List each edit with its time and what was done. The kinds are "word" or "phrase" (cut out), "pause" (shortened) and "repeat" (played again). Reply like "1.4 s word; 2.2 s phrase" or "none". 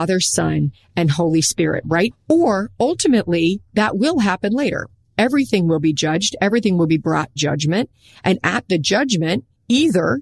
2.1 s word; 7.4 s word